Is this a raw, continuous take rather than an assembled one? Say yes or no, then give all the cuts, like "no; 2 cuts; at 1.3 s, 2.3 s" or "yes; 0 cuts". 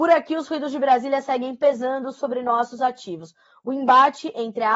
yes; 0 cuts